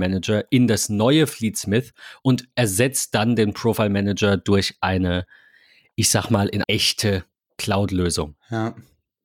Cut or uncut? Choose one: cut